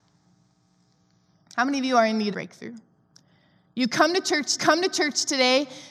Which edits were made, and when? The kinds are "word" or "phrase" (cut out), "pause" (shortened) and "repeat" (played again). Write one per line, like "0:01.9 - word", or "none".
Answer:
0:02.3 - phrase
0:04.6 - repeat